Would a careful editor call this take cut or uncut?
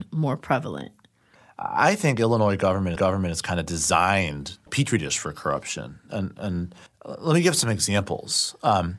cut